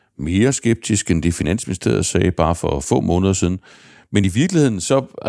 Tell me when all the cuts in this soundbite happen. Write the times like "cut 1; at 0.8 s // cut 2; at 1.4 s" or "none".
none